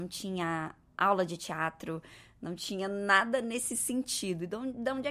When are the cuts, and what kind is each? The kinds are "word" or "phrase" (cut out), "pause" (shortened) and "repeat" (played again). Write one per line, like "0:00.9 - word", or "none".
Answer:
none